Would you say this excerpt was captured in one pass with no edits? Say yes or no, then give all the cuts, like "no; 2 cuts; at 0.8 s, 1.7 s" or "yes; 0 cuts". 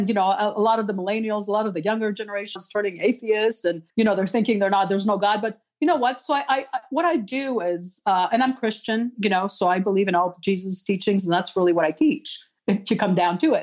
no; 2 cuts; at 2.6 s, 3.9 s